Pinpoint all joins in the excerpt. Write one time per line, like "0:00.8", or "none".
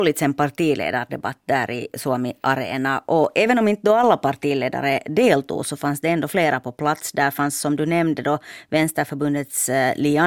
none